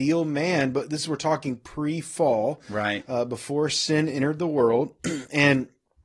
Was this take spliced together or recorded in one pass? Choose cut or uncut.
uncut